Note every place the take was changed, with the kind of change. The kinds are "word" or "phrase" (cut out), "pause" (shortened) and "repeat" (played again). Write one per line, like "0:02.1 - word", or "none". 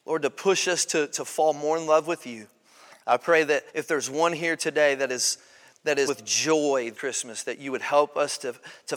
0:03.7 - pause
0:06.1 - word
0:06.9 - word